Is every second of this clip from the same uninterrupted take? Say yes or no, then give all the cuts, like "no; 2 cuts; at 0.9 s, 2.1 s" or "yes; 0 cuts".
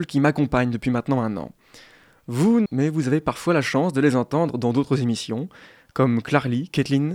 no; 1 cut; at 2.7 s